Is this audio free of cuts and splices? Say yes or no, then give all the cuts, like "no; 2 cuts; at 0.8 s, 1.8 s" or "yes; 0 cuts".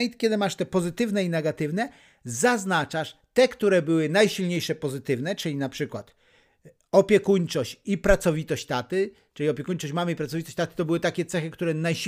yes; 0 cuts